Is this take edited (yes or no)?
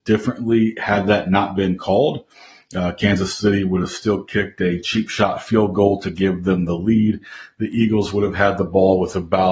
no